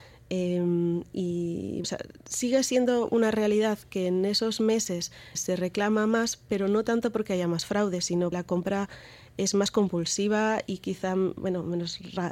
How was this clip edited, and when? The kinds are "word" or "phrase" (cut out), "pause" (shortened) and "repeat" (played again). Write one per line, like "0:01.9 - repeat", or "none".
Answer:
0:01.8 - word
0:02.2 - pause
0:05.3 - word
0:08.3 - word